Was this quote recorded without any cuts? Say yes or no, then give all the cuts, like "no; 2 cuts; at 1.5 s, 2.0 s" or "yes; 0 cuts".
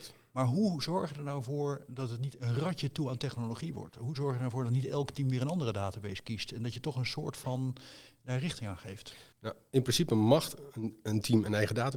no; 1 cut; at 9.3 s